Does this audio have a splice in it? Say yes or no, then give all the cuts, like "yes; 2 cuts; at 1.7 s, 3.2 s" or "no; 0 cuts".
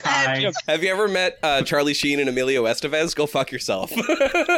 no; 0 cuts